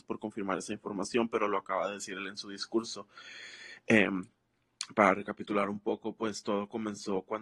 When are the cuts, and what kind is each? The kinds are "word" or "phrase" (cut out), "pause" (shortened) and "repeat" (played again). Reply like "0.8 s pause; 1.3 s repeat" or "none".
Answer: none